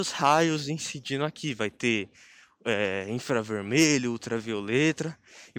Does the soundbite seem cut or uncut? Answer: uncut